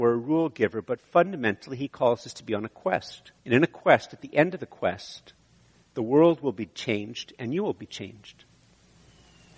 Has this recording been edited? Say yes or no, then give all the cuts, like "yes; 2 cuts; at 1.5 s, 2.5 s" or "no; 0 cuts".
yes; 1 cut; at 3.4 s